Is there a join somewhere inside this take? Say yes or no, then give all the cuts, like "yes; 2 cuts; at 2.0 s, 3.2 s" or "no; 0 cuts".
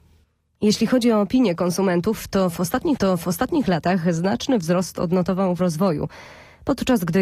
yes; 2 cuts; at 3.0 s, 5.6 s